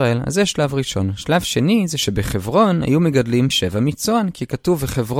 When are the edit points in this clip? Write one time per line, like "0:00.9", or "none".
0:03.5

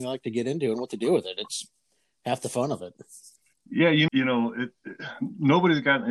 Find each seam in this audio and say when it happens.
0:04.1

